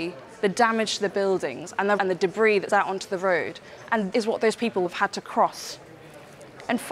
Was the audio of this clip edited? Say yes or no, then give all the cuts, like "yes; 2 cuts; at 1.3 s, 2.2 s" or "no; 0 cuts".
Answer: yes; 4 cuts; at 2.0 s, 2.7 s, 4.1 s, 4.9 s